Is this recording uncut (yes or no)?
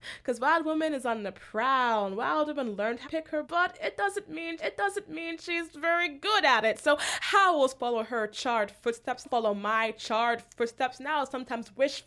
no